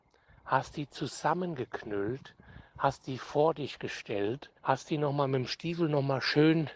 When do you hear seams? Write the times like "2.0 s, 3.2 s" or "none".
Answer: 4.6 s